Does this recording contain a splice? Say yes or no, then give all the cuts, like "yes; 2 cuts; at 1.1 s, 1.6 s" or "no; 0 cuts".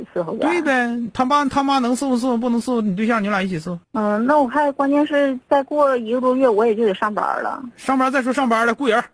yes; 1 cut; at 3.8 s